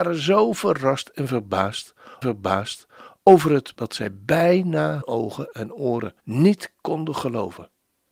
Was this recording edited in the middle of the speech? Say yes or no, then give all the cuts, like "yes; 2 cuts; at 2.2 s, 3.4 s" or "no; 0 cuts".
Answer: yes; 4 cuts; at 2.2 s, 3.7 s, 5.0 s, 6.2 s